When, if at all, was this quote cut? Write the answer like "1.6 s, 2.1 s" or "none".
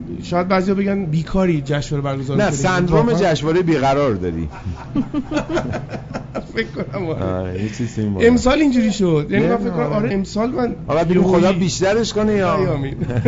10.1 s